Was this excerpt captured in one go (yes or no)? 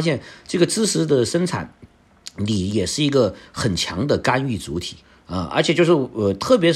no